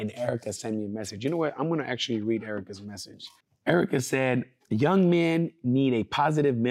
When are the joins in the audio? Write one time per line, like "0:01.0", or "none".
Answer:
0:03.4
0:04.6